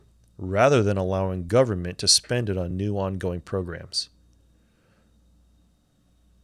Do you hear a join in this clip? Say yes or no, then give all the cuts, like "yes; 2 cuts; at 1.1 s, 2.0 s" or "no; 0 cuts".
no; 0 cuts